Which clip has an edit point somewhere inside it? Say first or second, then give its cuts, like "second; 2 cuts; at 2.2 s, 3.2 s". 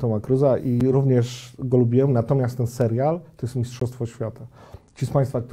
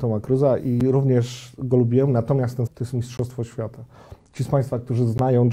second; 1 cut; at 2.7 s